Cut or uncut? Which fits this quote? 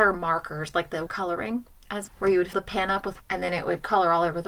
cut